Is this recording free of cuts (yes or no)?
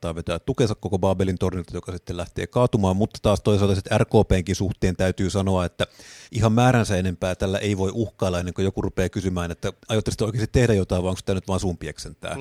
no